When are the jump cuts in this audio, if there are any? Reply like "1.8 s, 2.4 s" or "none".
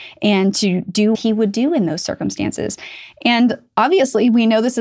1.1 s